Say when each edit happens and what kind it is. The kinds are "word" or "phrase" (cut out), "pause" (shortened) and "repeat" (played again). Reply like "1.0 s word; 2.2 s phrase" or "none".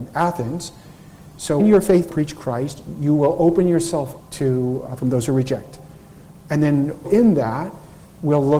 1.6 s word; 2.1 s word; 4.2 s word; 5.0 s word; 7.0 s word